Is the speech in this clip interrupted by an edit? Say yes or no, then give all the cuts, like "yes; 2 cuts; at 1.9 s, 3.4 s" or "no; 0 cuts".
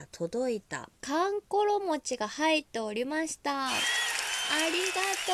yes; 1 cut; at 1.0 s